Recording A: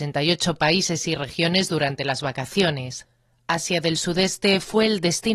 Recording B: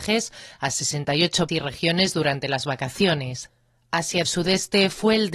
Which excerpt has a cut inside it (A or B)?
B